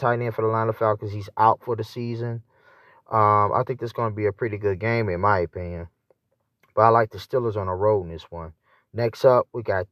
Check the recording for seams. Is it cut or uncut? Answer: uncut